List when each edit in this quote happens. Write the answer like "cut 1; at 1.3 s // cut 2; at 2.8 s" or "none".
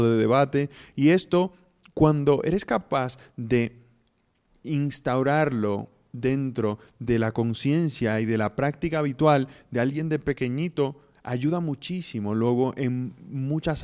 none